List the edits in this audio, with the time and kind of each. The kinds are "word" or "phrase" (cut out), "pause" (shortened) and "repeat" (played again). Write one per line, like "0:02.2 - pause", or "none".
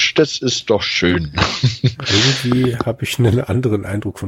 none

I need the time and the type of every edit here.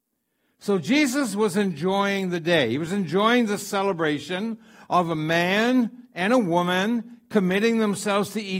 none

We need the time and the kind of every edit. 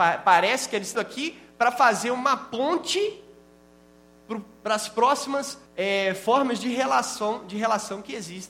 0:00.9 - word
0:05.7 - pause

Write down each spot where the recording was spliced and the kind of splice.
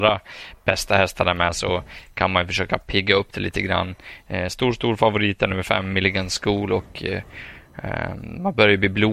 none

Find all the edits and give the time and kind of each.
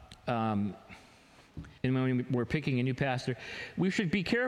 0:01.8 - pause

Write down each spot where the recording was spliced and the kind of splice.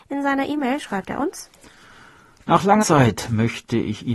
0:02.8 - word

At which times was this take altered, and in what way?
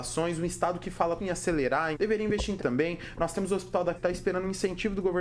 0:01.2 - word
0:01.9 - phrase
0:02.6 - word
0:04.0 - word

